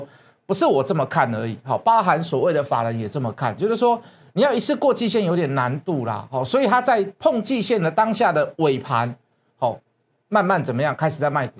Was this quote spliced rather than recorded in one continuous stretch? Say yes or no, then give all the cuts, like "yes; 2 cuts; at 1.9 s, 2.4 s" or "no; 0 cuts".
no; 0 cuts